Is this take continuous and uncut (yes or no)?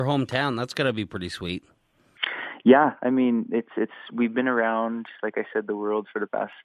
yes